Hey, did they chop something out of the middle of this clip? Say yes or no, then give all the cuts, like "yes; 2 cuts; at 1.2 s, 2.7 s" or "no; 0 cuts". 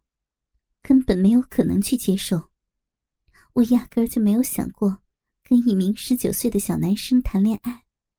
no; 0 cuts